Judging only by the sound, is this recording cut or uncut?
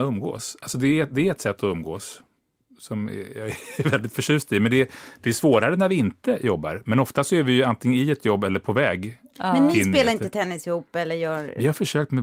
uncut